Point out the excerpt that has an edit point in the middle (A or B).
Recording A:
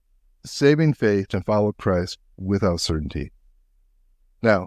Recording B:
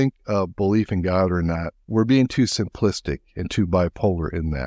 A